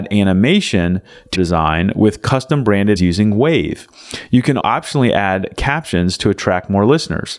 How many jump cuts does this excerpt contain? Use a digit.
3